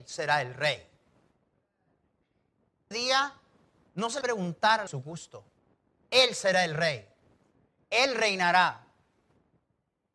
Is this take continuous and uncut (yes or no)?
no